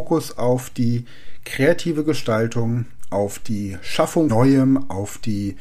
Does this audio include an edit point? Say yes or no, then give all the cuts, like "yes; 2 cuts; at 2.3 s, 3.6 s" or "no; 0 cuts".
yes; 1 cut; at 4.3 s